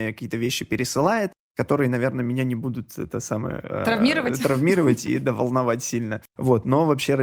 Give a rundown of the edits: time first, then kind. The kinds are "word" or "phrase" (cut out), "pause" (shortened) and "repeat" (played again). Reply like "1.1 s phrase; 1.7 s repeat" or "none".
6.3 s pause